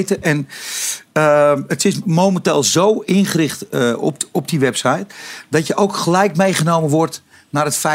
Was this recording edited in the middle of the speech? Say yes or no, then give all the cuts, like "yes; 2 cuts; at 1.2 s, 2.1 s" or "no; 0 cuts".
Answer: no; 0 cuts